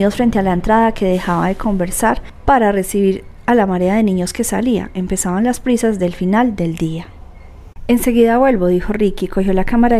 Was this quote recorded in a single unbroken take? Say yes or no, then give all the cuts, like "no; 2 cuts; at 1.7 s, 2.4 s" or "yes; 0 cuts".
yes; 0 cuts